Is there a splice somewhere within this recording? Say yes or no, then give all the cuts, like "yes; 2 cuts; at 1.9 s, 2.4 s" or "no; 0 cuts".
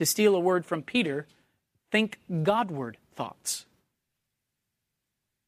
no; 0 cuts